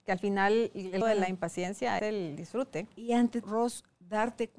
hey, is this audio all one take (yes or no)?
no